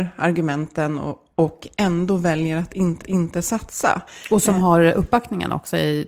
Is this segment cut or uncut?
cut